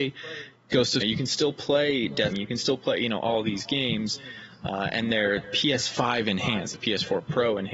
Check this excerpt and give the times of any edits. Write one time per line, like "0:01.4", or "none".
0:01.0
0:02.3
0:05.4
0:06.7